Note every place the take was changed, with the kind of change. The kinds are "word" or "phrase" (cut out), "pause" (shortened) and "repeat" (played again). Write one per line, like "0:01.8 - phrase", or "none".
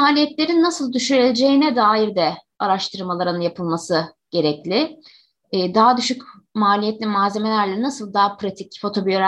none